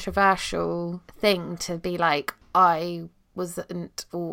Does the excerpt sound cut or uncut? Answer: cut